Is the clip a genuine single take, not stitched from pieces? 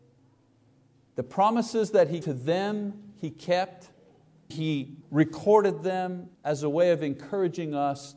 no; 4 cuts; at 2.2 s, 4.5 s, 5.0 s, 6.3 s

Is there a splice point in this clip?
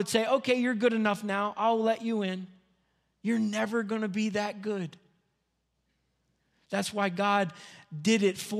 no; 0 cuts

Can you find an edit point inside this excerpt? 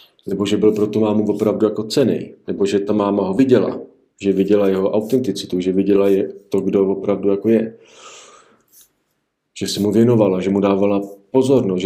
no; 0 cuts

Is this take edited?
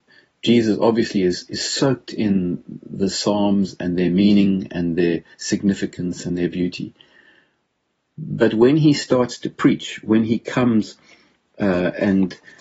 no; 0 cuts

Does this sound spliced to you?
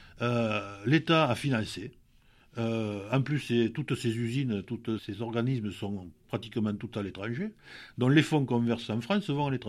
yes; 1 cut; at 5.0 s

